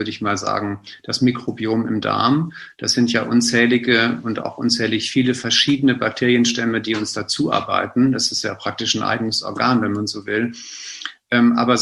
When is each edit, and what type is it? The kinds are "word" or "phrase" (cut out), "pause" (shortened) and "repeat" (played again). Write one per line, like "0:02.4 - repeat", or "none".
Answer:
none